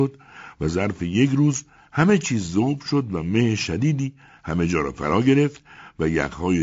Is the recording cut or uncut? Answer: uncut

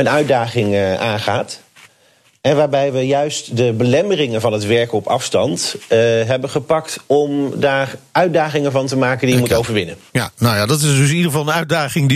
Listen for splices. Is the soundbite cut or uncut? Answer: uncut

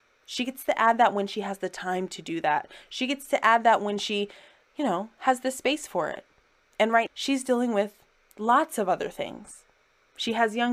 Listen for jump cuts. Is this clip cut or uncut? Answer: cut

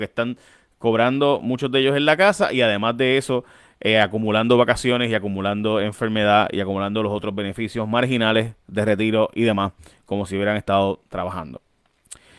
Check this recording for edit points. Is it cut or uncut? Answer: uncut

